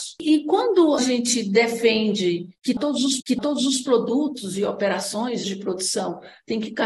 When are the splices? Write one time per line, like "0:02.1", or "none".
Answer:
0:01.0
0:03.2
0:05.4